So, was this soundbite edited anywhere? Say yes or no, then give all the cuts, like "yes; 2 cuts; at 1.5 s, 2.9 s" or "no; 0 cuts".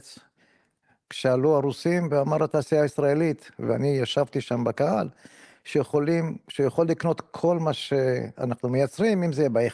no; 0 cuts